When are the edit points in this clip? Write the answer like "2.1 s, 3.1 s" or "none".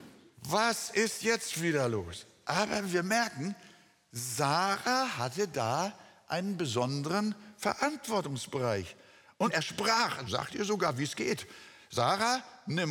none